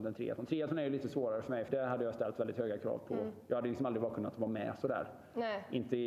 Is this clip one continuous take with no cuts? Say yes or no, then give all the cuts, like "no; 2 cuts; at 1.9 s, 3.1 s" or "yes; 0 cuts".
no; 1 cut; at 1.7 s